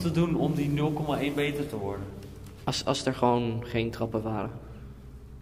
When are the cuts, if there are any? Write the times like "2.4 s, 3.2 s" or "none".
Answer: none